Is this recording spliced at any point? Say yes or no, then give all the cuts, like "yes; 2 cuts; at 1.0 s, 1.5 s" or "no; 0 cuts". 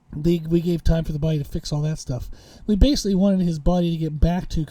no; 0 cuts